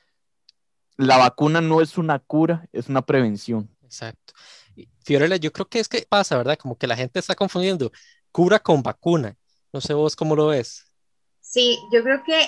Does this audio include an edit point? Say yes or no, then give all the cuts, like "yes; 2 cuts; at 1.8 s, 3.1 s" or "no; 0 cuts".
yes; 2 cuts; at 3.7 s, 6.0 s